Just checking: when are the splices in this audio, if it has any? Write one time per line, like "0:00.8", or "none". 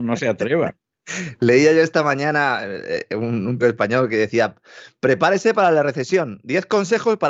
0:03.6

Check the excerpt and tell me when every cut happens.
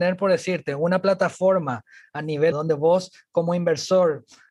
0:02.5

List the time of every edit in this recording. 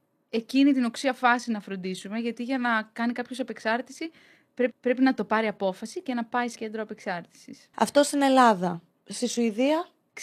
0:04.7
0:06.5

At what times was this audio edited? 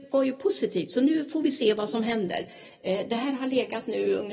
none

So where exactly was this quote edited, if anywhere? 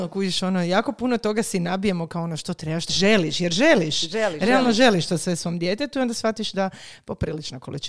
0:02.9

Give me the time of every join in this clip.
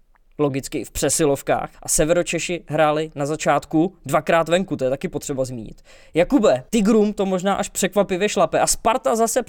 0:01.7
0:06.7

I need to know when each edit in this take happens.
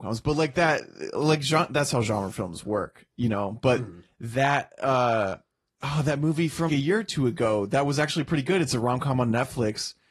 0:06.7

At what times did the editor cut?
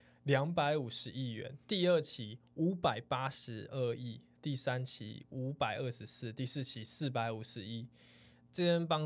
0:01.6

